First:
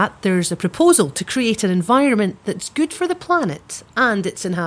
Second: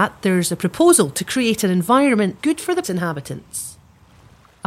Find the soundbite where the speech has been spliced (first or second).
second